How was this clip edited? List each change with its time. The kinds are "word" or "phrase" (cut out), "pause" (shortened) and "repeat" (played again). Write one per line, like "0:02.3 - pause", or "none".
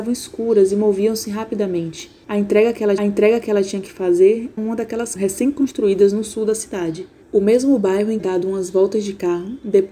0:02.2 - pause
0:03.0 - repeat
0:04.6 - word
0:05.2 - word
0:07.2 - pause
0:08.2 - phrase